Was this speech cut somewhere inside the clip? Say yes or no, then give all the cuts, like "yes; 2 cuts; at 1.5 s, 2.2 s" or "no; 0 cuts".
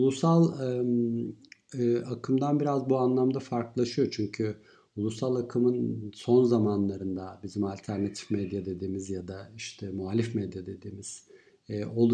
no; 0 cuts